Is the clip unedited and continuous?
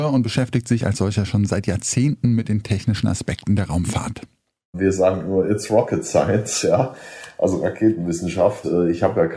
yes; 0 cuts

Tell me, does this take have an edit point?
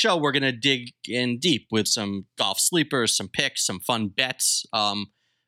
yes; 1 cut; at 1.8 s

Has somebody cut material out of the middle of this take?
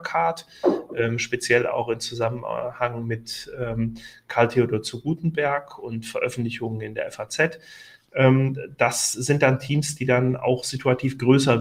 no; 0 cuts

